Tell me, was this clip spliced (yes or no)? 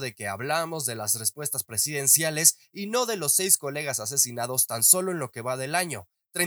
no